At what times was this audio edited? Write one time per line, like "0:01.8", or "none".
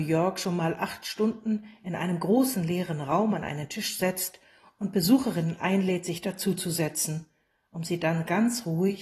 none